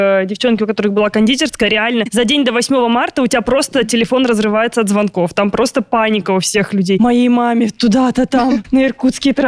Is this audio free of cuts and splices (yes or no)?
yes